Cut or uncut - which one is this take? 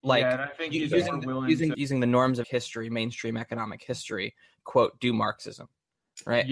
cut